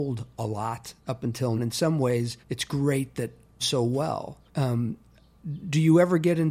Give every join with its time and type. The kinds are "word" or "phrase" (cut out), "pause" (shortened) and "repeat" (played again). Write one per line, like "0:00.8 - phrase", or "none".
0:01.0 - pause
0:01.6 - word
0:02.4 - pause
0:03.6 - phrase
0:04.5 - pause